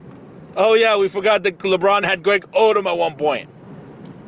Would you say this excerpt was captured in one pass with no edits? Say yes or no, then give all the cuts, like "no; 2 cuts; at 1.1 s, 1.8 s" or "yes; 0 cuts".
no; 1 cut; at 2.0 s